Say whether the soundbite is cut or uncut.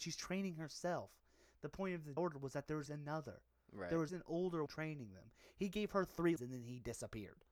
cut